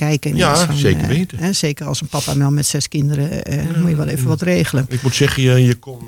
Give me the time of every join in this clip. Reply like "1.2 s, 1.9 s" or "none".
none